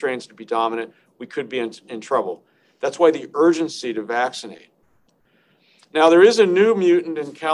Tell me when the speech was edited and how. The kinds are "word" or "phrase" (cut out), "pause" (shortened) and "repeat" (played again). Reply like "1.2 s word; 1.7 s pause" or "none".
none